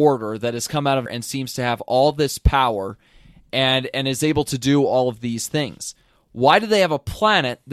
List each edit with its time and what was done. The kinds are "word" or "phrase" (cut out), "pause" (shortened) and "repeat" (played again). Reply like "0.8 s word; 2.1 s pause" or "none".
1.1 s word

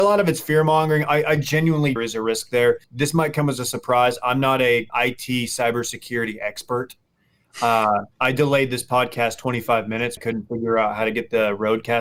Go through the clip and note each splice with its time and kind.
2.0 s phrase; 2.8 s pause; 4.9 s word; 8.1 s pause; 10.2 s phrase

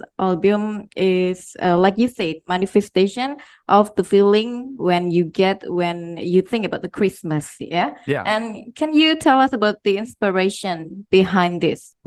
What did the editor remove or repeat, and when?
none

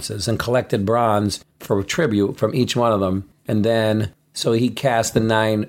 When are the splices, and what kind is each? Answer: 1.5 s pause; 3.4 s pause

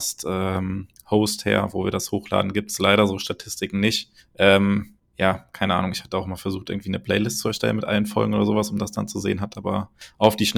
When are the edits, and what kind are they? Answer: none

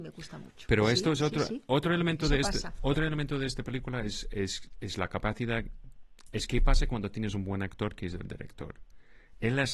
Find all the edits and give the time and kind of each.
none

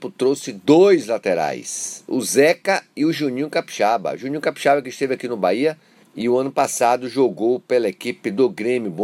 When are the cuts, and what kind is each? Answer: 6.0 s pause

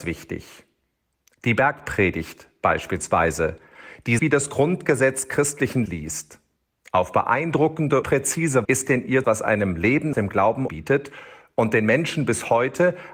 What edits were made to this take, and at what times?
4.2 s word; 5.9 s word; 8.0 s word; 8.6 s word; 9.2 s word; 10.1 s word; 10.7 s word

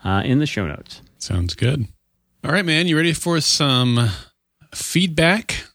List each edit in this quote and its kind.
none

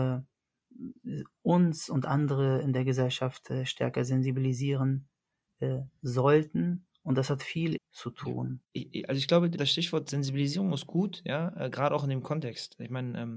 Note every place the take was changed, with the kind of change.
7.8 s phrase; 8.6 s pause; 9.5 s word

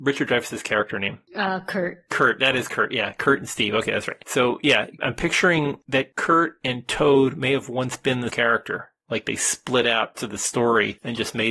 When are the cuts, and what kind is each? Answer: 5.0 s word; 8.3 s word; 10.2 s word

